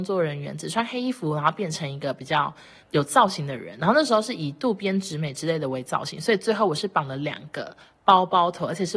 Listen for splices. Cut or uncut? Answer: uncut